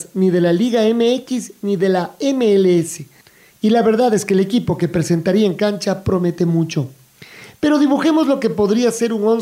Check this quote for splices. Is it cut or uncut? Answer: uncut